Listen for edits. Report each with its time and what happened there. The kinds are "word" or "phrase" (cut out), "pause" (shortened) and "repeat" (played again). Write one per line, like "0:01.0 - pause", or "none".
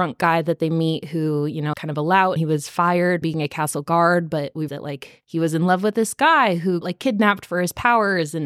0:01.7 - word
0:02.4 - word
0:03.2 - word
0:04.7 - word
0:06.8 - word